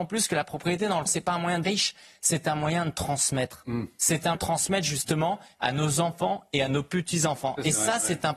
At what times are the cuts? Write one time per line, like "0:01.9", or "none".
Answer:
0:01.1
0:01.6
0:04.3